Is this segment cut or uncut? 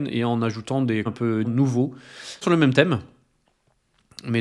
cut